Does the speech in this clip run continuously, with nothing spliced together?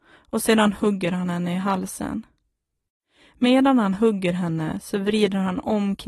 yes; 0 cuts

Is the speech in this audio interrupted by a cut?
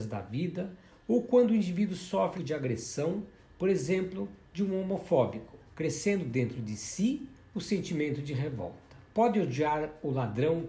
yes; 3 cuts; at 2.3 s, 5.6 s, 9.1 s

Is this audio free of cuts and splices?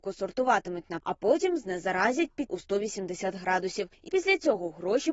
no; 3 cuts; at 1.0 s, 2.5 s, 4.1 s

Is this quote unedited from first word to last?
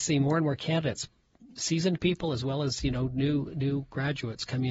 yes; 0 cuts

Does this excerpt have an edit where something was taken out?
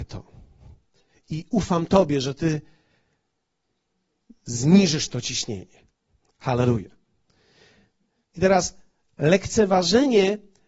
no; 0 cuts

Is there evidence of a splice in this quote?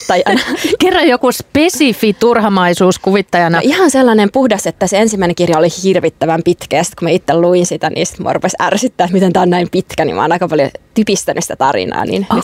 no; 0 cuts

